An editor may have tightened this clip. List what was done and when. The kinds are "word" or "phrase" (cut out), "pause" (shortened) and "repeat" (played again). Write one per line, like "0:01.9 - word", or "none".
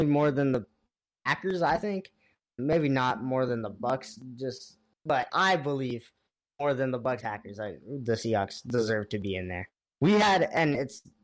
0:02.6 - word
0:05.3 - word
0:07.2 - word